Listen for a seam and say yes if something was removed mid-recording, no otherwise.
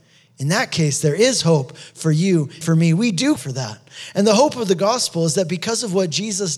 yes